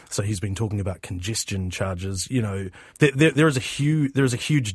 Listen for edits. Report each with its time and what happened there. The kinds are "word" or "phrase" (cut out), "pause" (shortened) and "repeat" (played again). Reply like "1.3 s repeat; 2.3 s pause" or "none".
2.9 s pause

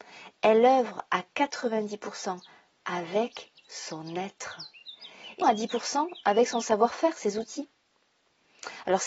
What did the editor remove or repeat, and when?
5.4 s word

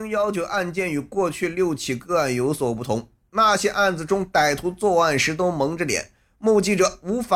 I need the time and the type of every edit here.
none

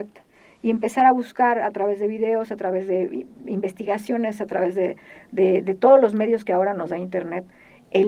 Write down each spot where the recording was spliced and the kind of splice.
none

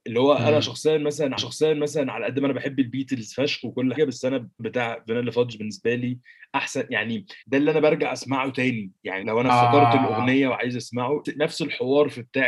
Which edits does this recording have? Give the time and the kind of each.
1.4 s repeat; 4.0 s word; 4.6 s word; 7.4 s pause; 9.2 s word; 11.2 s word

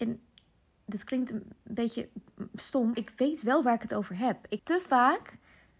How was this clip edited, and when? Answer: 2.9 s word; 4.6 s word

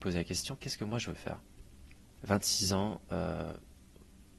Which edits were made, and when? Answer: 2.2 s phrase

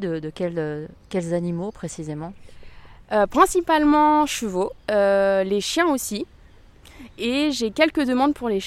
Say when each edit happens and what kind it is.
4.8 s pause

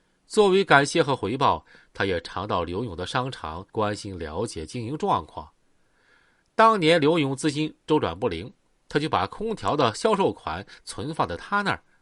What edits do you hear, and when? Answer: 3.7 s pause

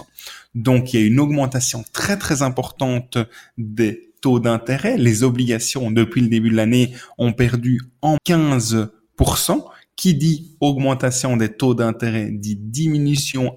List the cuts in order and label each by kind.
8.2 s word

